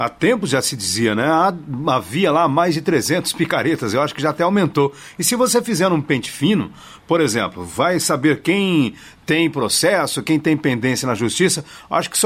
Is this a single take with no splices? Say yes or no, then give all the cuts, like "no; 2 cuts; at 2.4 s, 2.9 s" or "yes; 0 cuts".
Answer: yes; 0 cuts